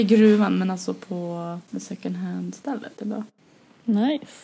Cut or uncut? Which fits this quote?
cut